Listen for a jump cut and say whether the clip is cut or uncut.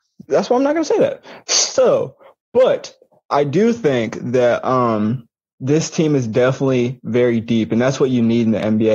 uncut